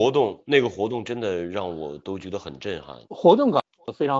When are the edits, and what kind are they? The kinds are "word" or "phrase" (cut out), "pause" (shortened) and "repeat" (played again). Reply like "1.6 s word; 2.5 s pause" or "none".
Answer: 3.0 s pause